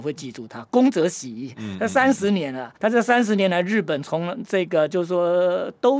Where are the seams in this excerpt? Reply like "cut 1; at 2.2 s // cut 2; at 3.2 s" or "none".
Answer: cut 1; at 2.8 s